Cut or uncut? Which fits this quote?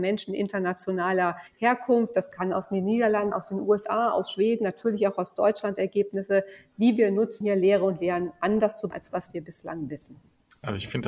cut